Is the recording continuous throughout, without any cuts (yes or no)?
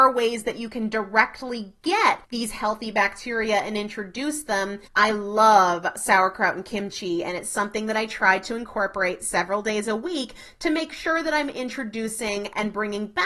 no